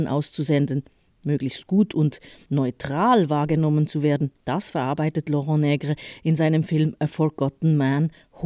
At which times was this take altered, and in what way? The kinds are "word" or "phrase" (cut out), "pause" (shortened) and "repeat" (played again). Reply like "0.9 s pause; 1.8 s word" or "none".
2.4 s word; 4.3 s pause